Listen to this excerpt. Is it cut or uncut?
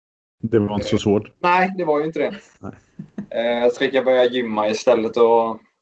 cut